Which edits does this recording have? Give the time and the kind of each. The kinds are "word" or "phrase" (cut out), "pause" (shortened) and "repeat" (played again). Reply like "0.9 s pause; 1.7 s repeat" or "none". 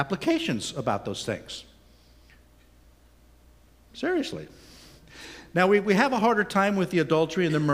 none